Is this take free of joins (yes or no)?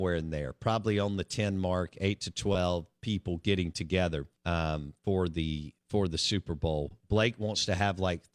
no